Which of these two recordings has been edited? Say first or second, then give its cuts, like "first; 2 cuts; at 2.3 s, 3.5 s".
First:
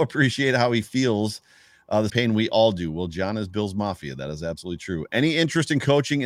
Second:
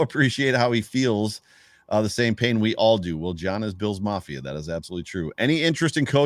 first; 1 cut; at 2.1 s